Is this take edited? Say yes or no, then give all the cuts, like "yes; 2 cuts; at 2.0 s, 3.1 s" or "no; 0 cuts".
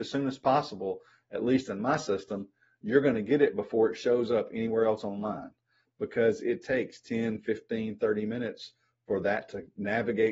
no; 0 cuts